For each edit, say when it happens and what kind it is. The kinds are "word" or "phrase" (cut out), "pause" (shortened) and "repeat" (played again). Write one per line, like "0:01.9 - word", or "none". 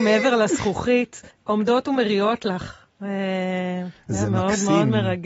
0:01.3 - pause